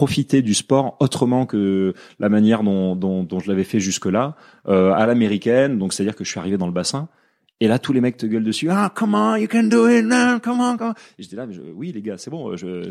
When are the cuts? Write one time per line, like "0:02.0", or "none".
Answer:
none